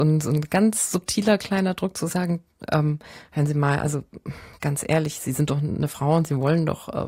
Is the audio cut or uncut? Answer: uncut